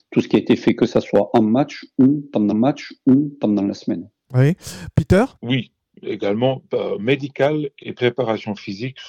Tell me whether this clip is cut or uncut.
cut